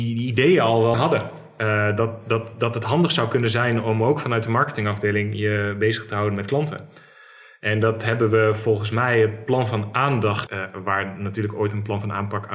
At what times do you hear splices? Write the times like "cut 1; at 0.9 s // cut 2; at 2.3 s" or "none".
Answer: cut 1; at 0.9 s // cut 2; at 10.5 s